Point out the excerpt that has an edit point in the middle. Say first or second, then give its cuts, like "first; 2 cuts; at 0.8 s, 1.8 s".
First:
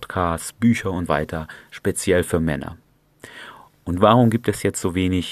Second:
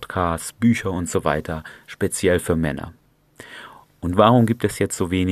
first; 1 cut; at 1.1 s